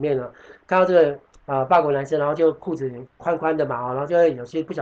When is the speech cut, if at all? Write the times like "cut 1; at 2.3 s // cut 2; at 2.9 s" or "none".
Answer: cut 1; at 3.1 s